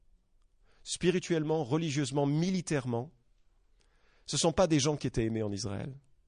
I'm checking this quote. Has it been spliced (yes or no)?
no